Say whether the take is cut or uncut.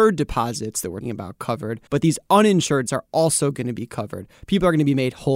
cut